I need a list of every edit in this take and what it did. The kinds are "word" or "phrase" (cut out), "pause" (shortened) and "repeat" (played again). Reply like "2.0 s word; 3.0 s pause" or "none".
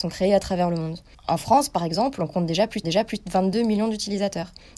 1.1 s pause; 2.8 s repeat